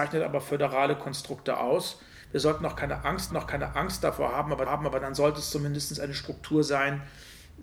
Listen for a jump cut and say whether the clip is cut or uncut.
cut